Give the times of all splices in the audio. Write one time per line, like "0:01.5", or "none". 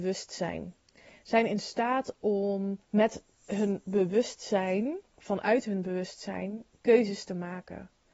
0:02.8
0:05.1